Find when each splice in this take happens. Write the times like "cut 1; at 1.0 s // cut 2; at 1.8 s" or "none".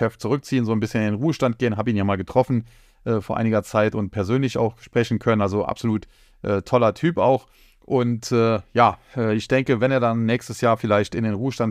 none